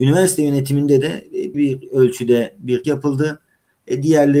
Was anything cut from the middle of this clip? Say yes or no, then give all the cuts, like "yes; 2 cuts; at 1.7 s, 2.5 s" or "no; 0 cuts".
yes; 2 cuts; at 1.5 s, 2.8 s